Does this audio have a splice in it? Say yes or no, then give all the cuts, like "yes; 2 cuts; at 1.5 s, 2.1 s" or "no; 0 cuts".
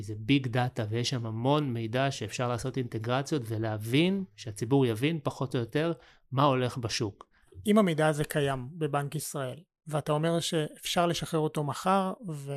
no; 0 cuts